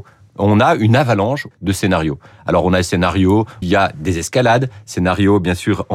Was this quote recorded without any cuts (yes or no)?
no